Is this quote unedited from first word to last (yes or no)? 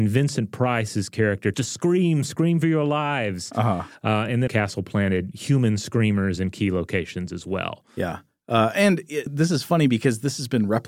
no